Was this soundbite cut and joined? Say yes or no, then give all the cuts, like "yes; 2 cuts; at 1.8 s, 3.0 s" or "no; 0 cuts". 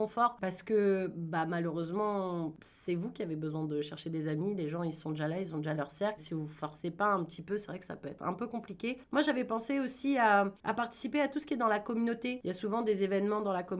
yes; 1 cut; at 6.2 s